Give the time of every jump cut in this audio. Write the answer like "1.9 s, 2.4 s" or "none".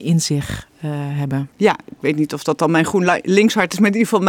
1.5 s

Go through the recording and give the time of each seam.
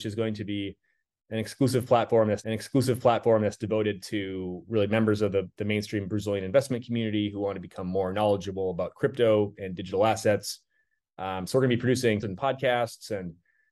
2.4 s, 12.2 s

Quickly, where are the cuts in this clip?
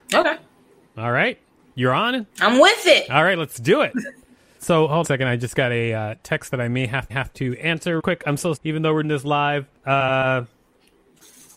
1.6 s, 2.3 s, 4.6 s, 5.0 s, 7.1 s, 8.0 s, 8.6 s, 9.0 s, 9.8 s

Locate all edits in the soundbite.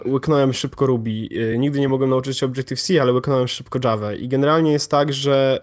none

